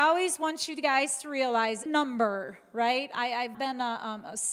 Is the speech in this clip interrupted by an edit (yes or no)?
yes